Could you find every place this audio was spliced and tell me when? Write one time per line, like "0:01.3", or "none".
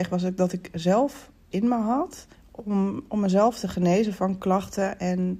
0:01.5
0:02.3